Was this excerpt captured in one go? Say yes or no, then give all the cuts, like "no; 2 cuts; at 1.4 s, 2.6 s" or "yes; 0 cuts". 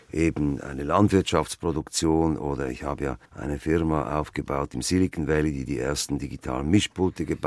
no; 1 cut; at 3.2 s